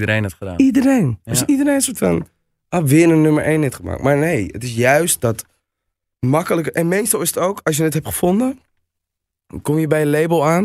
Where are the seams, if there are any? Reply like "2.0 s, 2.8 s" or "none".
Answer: none